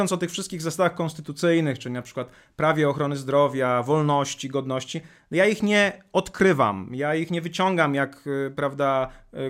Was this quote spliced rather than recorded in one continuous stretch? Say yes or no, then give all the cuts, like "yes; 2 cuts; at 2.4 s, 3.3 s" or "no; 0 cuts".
no; 0 cuts